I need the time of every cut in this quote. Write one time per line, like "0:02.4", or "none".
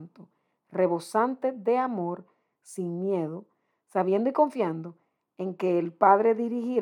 none